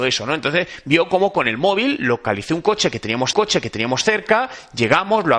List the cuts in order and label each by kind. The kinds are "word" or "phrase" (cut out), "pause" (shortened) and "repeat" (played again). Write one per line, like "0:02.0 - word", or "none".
0:03.3 - repeat